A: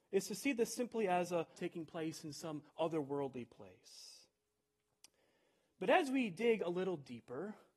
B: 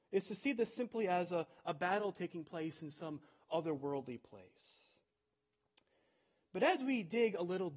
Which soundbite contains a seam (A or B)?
A